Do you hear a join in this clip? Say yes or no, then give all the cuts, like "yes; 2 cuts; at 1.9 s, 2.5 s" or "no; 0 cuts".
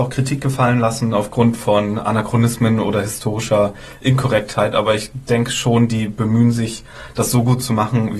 no; 0 cuts